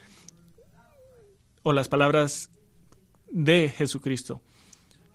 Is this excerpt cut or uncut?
uncut